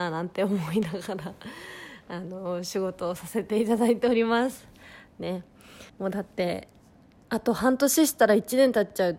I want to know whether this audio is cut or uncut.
cut